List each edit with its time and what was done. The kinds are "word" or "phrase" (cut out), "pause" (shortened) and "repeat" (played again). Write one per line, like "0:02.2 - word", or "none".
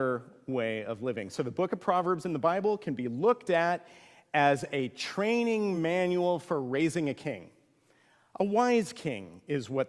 none